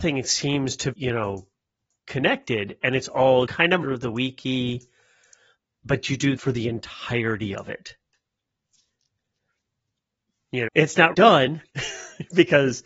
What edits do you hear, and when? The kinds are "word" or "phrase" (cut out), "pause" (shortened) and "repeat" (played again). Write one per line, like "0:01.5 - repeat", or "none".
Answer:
0:00.9 - word
0:03.5 - word
0:03.8 - word
0:06.4 - word
0:10.7 - word
0:11.1 - word